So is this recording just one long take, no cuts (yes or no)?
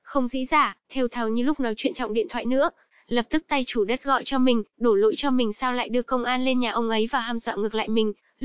yes